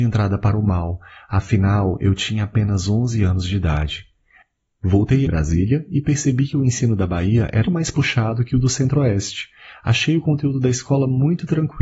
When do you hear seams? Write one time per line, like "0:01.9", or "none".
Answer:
0:05.3
0:07.6